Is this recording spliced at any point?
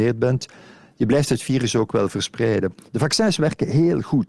no; 0 cuts

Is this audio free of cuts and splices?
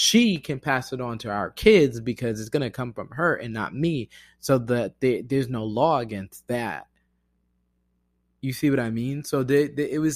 yes; 0 cuts

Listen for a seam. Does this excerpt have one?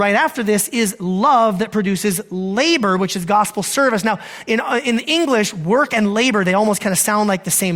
no; 0 cuts

